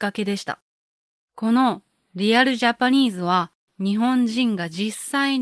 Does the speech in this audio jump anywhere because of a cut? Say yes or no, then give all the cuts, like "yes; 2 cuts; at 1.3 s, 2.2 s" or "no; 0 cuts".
no; 0 cuts